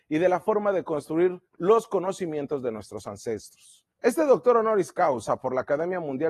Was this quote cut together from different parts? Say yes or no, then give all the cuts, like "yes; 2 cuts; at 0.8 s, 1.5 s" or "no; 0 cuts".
yes; 2 cuts; at 1.5 s, 3.9 s